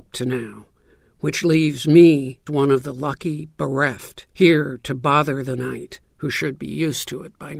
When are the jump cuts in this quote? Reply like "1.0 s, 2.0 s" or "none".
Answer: 2.5 s, 4.3 s, 6.1 s